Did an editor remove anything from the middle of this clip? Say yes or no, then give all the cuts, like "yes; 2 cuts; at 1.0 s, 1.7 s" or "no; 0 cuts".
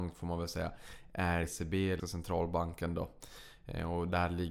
yes; 2 cuts; at 1.4 s, 2.0 s